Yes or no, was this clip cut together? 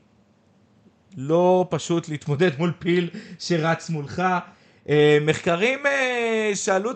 no